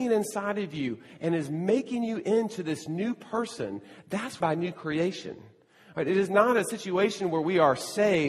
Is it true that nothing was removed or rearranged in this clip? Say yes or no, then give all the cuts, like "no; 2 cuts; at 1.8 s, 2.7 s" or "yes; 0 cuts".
no; 1 cut; at 4.4 s